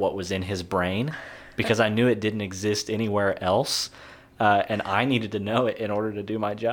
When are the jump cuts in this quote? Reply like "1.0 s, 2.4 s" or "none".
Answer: none